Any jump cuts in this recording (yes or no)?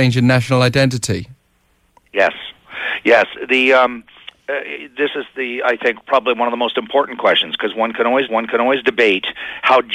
yes